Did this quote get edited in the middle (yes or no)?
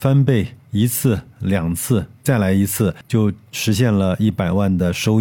no